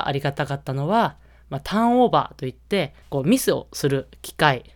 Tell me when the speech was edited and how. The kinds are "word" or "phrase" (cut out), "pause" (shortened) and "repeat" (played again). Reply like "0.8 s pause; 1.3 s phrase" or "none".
3.0 s pause